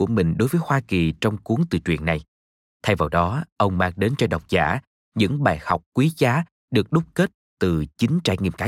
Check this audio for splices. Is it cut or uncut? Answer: uncut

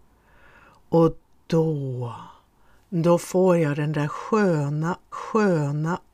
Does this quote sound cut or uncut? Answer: cut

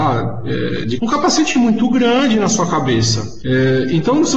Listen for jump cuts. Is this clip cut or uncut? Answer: cut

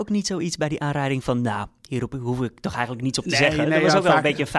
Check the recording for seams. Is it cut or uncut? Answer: uncut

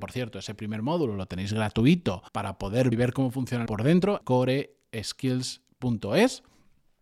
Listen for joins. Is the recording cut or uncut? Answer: cut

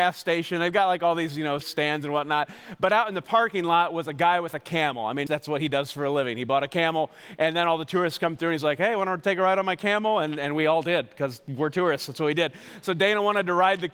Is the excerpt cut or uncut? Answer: cut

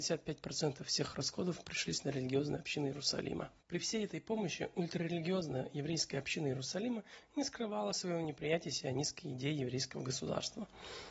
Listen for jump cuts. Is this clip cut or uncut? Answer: cut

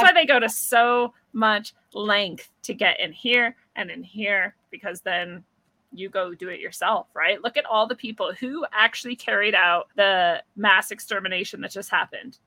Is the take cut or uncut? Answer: cut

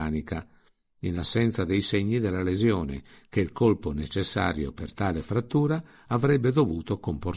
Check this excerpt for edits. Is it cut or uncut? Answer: uncut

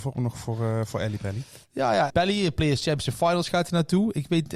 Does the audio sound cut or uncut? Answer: cut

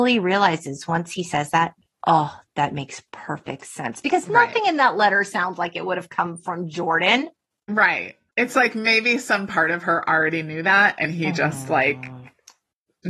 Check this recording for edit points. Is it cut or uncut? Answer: uncut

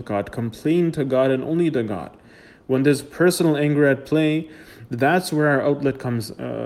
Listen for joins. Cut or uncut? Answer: uncut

